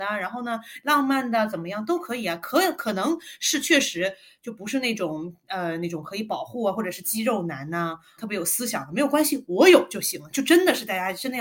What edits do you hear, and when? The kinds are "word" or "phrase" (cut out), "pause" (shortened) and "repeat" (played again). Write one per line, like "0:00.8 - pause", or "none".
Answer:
0:08.2 - word